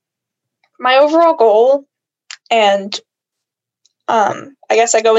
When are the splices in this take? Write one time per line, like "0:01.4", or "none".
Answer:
none